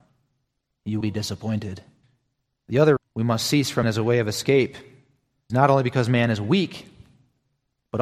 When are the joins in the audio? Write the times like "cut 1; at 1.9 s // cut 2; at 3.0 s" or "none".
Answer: cut 1; at 1.0 s // cut 2; at 2.0 s // cut 3; at 3.0 s // cut 4; at 3.8 s // cut 5; at 5.5 s

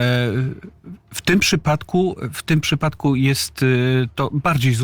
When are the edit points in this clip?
none

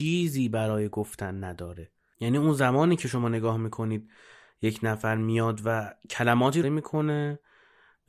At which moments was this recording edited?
cut 1; at 6.6 s

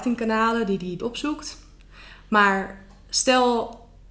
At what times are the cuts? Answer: cut 1; at 1.0 s

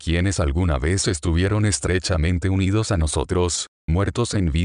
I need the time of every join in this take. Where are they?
none

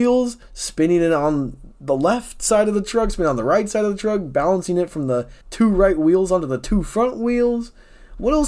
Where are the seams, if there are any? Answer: cut 1; at 5.4 s

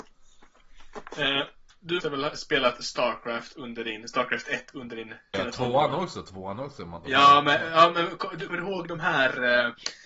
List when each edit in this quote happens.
cut 1; at 2.0 s // cut 2; at 5.3 s // cut 3; at 8.5 s

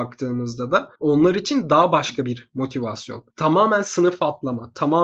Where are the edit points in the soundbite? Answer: cut 1; at 1.0 s // cut 2; at 3.3 s

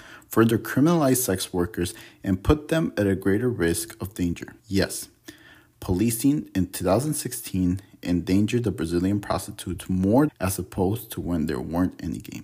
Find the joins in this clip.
cut 1; at 4.6 s // cut 2; at 10.3 s

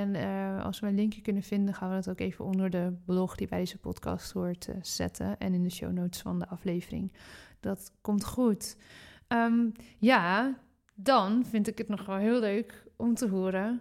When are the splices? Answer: none

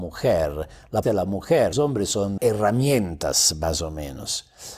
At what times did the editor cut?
cut 1; at 1.0 s // cut 2; at 1.7 s // cut 3; at 2.4 s

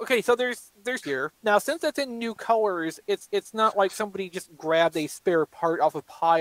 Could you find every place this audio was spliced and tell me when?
cut 1; at 1.0 s // cut 2; at 1.4 s // cut 3; at 3.3 s

